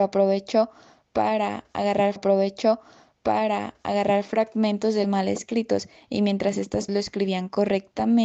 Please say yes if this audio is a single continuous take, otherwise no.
no